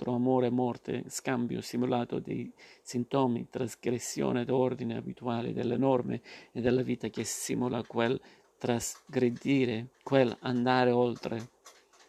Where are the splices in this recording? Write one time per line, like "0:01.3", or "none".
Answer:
0:10.0